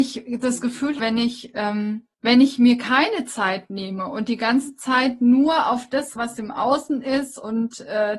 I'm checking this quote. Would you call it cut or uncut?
cut